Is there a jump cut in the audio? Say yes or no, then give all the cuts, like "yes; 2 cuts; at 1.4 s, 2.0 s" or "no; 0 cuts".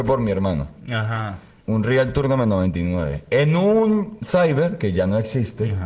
no; 0 cuts